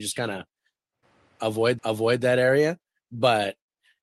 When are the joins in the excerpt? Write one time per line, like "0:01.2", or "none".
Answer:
0:01.8